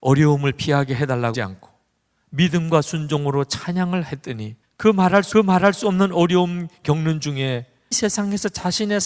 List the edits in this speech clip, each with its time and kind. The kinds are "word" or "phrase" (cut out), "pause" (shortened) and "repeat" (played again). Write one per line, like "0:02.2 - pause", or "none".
0:01.3 - word
0:04.6 - pause
0:05.3 - repeat
0:07.9 - word